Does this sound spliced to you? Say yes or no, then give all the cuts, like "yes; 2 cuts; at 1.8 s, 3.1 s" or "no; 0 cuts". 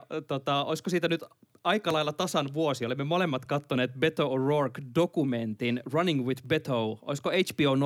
no; 0 cuts